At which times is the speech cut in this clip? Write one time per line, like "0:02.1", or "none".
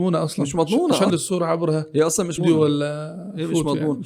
0:01.1
0:02.4